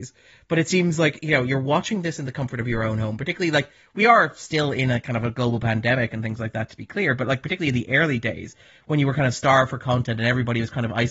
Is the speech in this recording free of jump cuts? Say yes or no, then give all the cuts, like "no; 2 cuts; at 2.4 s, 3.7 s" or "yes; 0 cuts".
yes; 0 cuts